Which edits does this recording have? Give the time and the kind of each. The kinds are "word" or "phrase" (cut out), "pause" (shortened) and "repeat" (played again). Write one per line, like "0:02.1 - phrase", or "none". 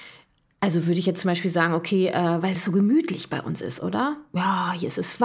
none